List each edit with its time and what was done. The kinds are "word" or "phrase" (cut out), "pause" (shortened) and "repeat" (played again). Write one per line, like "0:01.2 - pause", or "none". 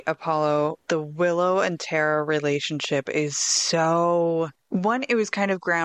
0:04.6 - pause